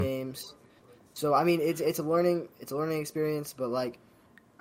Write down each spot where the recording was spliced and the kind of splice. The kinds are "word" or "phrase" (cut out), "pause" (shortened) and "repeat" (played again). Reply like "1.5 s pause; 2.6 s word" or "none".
2.5 s pause